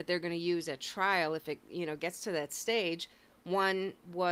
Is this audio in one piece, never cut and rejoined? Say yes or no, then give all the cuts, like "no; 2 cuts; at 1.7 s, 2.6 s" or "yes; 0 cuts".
yes; 0 cuts